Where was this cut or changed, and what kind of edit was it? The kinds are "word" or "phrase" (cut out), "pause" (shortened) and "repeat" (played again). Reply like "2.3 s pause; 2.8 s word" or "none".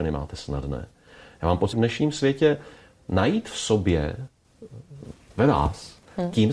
1.7 s word